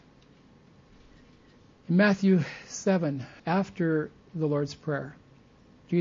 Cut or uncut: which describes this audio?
cut